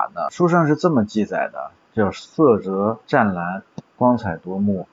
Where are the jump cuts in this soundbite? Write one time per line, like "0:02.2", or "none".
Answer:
0:01.7
0:03.0